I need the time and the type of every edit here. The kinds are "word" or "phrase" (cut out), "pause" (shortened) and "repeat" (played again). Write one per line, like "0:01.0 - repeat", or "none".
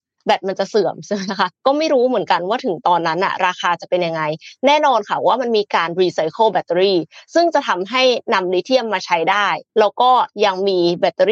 0:01.5 - pause
0:09.7 - pause